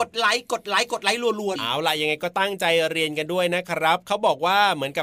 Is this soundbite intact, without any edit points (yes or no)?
no